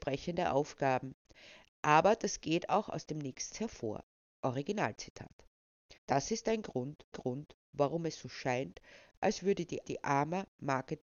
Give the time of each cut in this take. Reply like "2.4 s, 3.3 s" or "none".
3.5 s, 6.0 s, 7.1 s, 9.8 s